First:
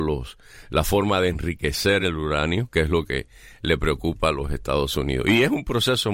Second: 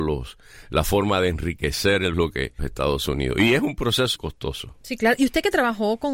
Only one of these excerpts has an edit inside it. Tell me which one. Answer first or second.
second